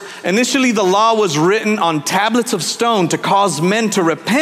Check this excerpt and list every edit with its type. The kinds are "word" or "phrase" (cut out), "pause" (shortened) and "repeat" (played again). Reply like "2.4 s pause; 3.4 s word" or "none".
none